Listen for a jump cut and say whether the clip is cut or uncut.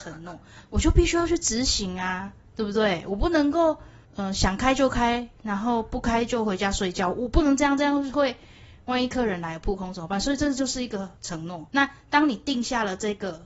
cut